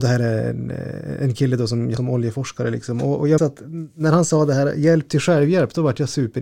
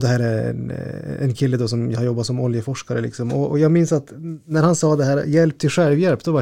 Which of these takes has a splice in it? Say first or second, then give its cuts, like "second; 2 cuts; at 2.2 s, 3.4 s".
first; 2 cuts; at 2.0 s, 3.4 s